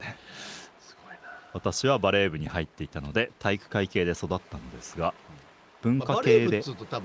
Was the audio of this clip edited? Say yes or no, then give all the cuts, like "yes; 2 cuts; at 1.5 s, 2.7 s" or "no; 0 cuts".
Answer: no; 0 cuts